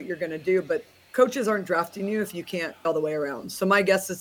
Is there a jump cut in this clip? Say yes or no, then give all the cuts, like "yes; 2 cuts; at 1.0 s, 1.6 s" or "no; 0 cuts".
yes; 1 cut; at 2.8 s